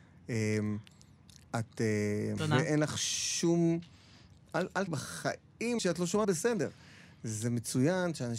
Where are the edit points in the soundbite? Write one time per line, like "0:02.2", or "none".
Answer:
0:02.4
0:04.9
0:05.8
0:06.2